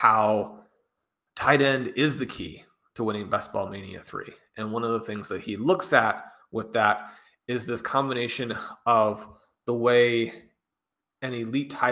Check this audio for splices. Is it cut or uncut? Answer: uncut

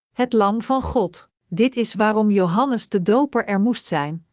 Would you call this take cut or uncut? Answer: cut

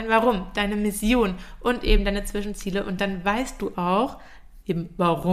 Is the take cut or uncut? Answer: uncut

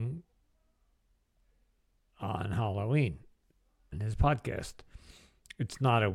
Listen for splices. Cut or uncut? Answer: cut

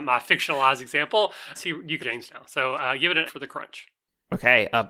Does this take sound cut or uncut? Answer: cut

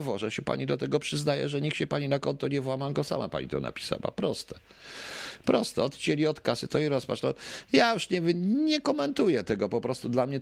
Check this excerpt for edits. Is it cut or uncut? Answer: uncut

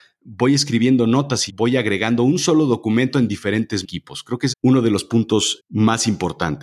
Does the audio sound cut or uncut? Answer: cut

